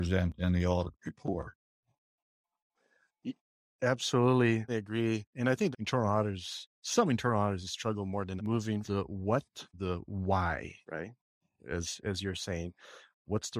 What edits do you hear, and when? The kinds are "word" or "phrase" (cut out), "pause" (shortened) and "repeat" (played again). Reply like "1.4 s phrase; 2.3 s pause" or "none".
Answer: 4.7 s word; 5.7 s phrase; 8.4 s word; 8.8 s word; 9.7 s phrase; 10.8 s pause